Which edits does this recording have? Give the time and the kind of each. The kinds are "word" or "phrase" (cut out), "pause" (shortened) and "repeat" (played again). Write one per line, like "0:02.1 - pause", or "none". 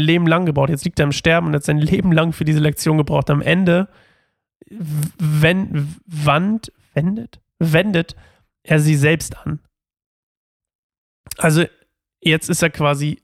none